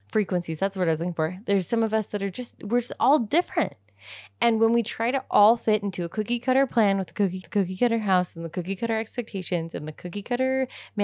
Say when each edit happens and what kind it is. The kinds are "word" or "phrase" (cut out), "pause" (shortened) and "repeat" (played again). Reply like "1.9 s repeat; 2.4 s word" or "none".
7.4 s repeat